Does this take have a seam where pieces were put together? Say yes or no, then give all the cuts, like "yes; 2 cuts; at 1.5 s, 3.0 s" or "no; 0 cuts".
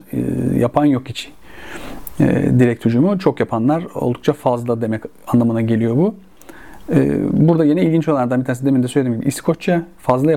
no; 0 cuts